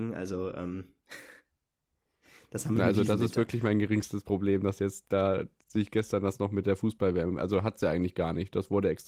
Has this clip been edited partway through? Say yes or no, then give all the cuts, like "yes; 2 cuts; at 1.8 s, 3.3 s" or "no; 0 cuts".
no; 0 cuts